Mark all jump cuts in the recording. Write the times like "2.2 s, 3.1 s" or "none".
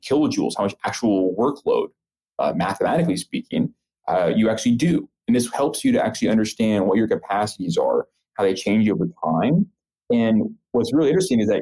none

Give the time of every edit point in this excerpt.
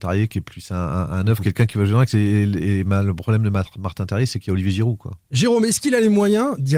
5.2 s

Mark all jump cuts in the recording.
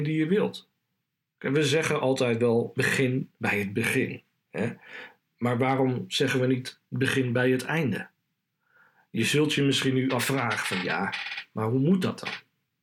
none

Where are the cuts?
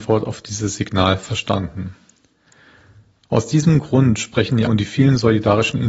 4.7 s

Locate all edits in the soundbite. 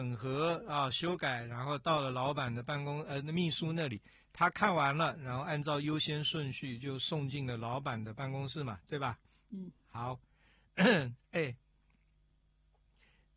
none

